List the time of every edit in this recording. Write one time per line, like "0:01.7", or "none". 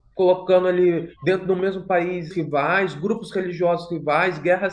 0:02.3